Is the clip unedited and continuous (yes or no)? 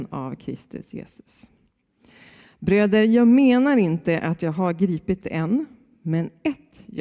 yes